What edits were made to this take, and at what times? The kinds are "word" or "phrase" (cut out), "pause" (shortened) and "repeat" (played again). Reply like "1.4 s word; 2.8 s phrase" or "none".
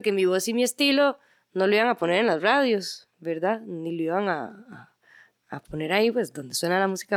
none